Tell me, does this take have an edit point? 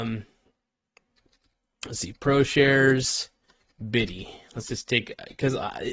no; 0 cuts

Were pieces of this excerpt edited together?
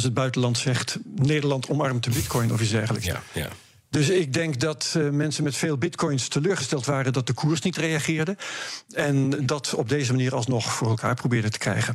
no; 0 cuts

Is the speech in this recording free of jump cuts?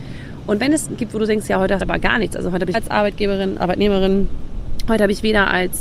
no; 4 cuts; at 1.0 s, 1.8 s, 2.7 s, 3.6 s

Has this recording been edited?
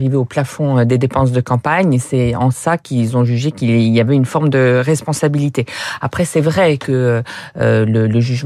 no; 0 cuts

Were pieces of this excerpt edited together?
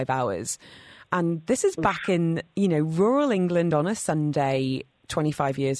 no; 0 cuts

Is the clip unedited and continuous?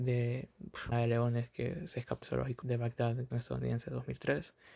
no; 4 cuts; at 0.9 s, 2.2 s, 2.6 s, 3.3 s

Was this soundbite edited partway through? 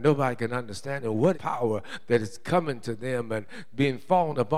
yes; 1 cut; at 1.3 s

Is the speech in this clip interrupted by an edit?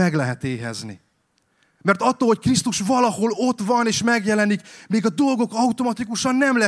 no; 0 cuts

